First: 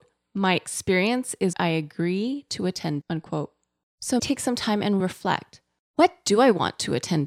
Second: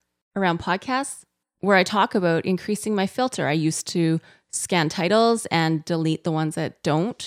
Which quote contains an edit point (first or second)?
first